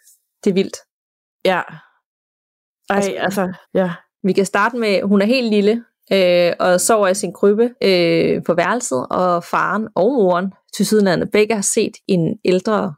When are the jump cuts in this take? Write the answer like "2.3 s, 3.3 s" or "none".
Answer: 3.6 s, 7.8 s